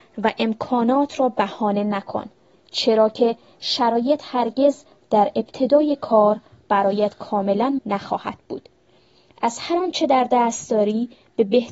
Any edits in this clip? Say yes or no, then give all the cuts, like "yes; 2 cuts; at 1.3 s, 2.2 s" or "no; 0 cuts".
yes; 1 cut; at 7.8 s